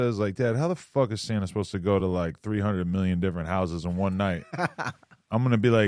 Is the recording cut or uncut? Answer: uncut